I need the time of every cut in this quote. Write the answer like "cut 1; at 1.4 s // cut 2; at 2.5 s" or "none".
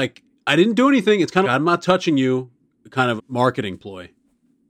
cut 1; at 1.4 s // cut 2; at 3.2 s